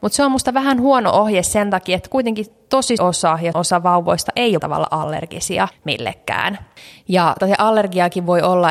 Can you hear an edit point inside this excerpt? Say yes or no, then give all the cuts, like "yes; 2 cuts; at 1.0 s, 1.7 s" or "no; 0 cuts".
yes; 4 cuts; at 3.0 s, 3.5 s, 4.6 s, 7.4 s